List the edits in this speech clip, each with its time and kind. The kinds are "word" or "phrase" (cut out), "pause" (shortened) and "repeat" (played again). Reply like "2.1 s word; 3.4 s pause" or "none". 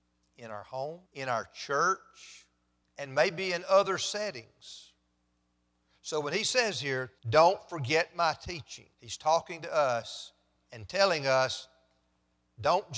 1.1 s pause; 2.8 s pause; 7.2 s pause; 8.9 s pause